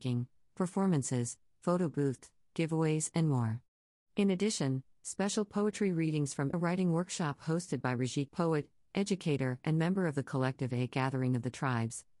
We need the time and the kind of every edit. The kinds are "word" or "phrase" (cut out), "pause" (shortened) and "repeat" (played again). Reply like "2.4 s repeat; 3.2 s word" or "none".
6.5 s phrase; 8.3 s word